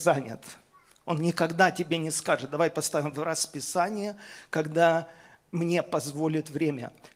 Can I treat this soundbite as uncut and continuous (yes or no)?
yes